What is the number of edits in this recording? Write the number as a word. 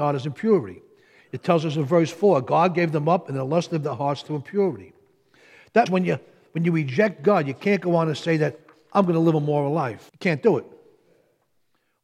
two